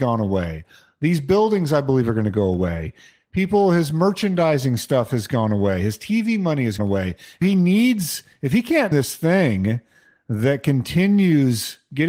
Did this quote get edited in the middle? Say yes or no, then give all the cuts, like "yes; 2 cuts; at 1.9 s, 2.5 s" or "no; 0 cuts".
yes; 3 cuts; at 6.8 s, 7.4 s, 8.9 s